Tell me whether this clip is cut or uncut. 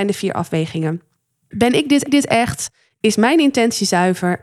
cut